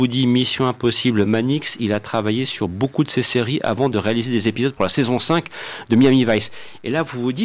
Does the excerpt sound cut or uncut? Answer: uncut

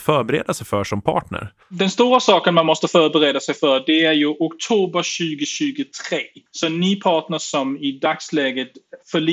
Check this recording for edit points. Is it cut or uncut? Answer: cut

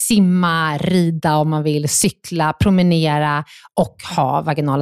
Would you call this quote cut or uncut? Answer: uncut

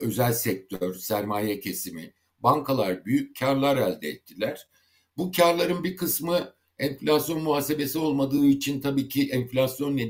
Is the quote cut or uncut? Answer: uncut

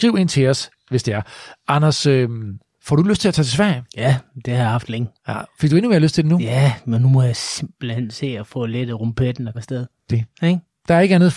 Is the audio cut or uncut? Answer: cut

